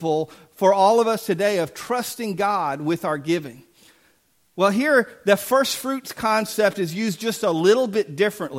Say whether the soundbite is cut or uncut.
uncut